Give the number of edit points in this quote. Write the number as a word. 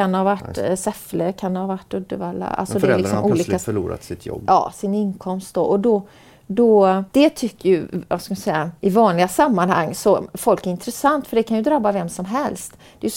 two